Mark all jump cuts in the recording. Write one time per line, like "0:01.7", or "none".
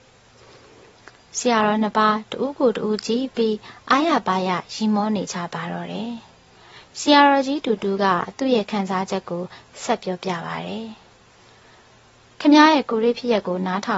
none